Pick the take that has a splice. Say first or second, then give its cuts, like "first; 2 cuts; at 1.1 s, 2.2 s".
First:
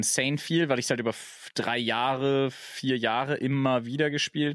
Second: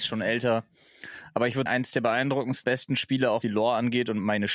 second; 3 cuts; at 1.7 s, 2.6 s, 3.4 s